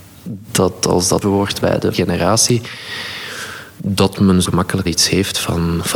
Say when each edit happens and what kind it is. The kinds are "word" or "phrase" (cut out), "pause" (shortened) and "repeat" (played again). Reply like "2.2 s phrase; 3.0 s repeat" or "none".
1.2 s word; 1.6 s word; 1.9 s word; 4.4 s word; 4.9 s word